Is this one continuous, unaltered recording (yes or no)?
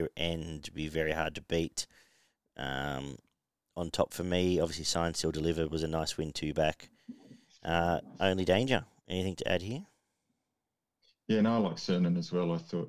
yes